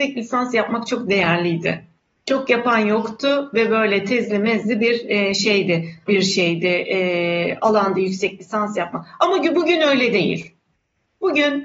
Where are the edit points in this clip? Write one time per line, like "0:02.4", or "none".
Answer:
0:06.1